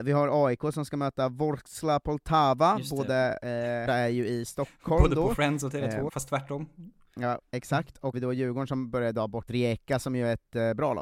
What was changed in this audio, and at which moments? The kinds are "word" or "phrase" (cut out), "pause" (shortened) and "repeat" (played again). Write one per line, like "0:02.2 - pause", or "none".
0:03.9 - phrase
0:06.1 - word
0:07.5 - pause
0:08.1 - phrase
0:09.5 - word